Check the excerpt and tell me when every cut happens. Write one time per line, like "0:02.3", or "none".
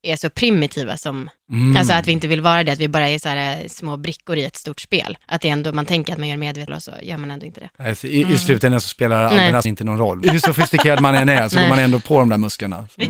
0:01.4
0:05.2
0:06.7
0:09.6
0:10.2